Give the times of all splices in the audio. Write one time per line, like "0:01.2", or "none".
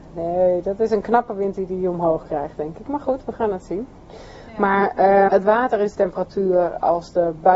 0:05.3
0:05.9